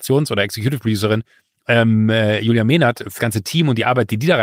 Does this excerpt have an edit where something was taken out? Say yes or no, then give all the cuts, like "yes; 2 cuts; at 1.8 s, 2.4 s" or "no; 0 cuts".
yes; 1 cut; at 3.2 s